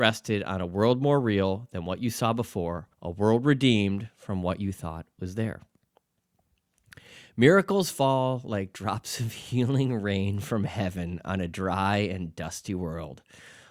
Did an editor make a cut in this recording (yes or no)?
yes